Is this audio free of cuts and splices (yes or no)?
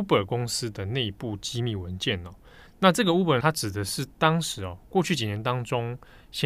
no